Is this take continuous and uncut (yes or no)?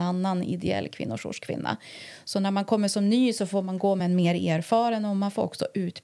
yes